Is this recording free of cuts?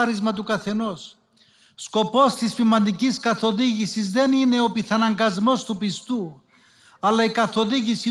yes; 0 cuts

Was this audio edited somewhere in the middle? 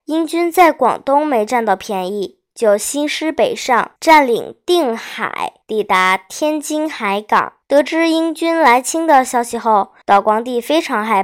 yes; 4 cuts; at 4.0 s, 5.6 s, 7.6 s, 10.0 s

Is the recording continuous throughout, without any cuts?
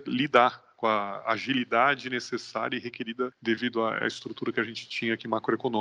yes; 0 cuts

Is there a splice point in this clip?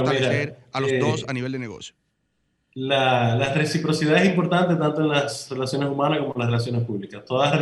no; 0 cuts

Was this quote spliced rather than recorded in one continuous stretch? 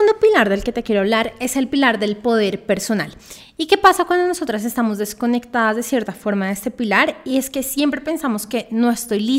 no; 0 cuts

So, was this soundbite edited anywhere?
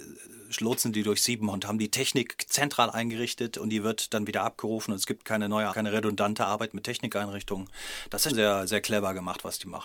yes; 3 cuts; at 1.5 s, 5.7 s, 8.3 s

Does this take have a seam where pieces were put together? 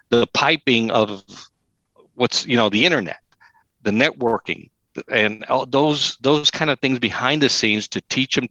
no; 0 cuts

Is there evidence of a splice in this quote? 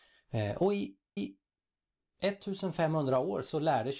yes; 1 cut; at 1.2 s

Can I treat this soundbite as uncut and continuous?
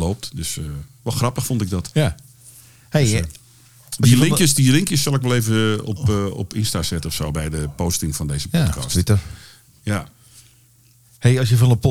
yes; 0 cuts

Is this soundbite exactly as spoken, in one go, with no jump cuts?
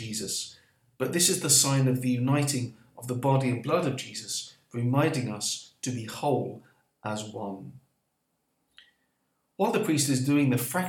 yes; 0 cuts

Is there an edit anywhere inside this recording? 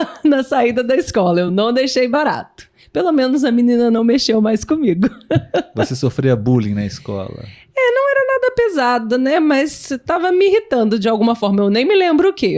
no; 0 cuts

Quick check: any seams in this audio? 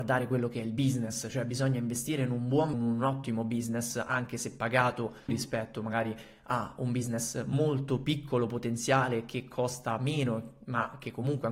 yes; 2 cuts; at 2.7 s, 5.3 s

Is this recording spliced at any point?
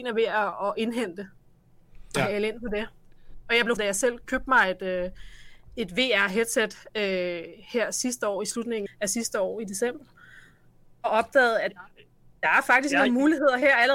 yes; 3 cuts; at 3.8 s, 4.2 s, 8.9 s

